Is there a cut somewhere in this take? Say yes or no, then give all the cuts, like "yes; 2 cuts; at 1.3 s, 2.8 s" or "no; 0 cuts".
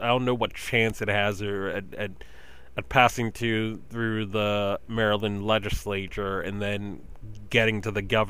no; 0 cuts